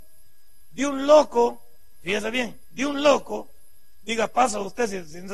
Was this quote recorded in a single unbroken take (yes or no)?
yes